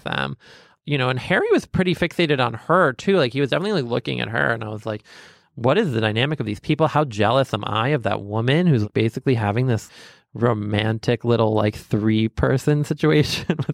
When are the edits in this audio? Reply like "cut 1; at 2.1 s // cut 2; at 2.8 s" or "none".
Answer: none